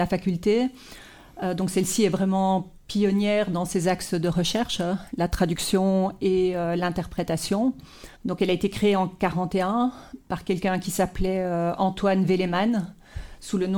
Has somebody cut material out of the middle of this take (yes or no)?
yes